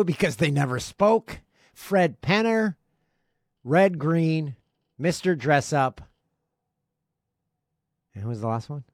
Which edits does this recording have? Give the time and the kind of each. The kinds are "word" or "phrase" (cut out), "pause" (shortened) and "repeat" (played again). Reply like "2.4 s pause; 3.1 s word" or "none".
none